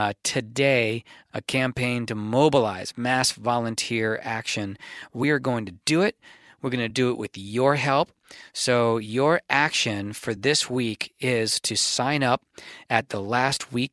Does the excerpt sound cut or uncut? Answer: uncut